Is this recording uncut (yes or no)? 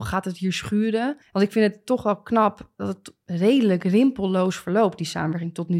no